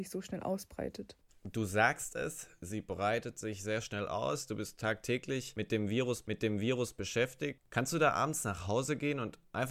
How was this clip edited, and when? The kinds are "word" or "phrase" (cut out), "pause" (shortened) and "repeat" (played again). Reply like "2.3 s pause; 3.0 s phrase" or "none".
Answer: 6.2 s repeat